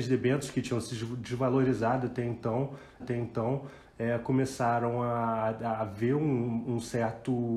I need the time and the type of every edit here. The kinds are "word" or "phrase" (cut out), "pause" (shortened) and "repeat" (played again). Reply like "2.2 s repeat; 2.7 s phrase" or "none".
3.0 s repeat